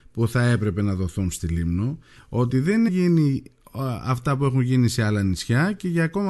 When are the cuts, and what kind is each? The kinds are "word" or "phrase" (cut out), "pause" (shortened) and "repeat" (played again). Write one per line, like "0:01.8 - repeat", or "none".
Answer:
0:02.9 - word